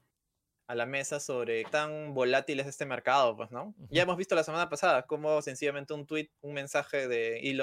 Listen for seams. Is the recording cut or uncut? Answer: cut